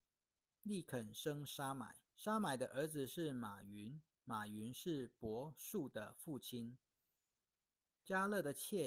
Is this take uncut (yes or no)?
no